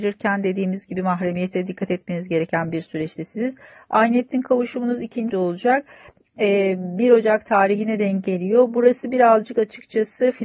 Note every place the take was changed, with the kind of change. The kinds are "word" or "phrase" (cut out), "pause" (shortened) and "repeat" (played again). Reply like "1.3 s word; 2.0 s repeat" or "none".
5.3 s word